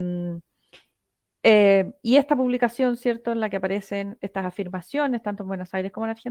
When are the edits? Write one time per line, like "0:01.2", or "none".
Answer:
none

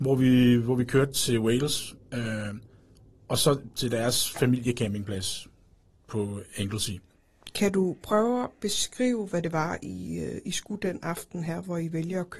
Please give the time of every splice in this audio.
none

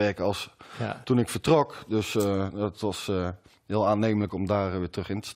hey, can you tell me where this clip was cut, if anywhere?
none

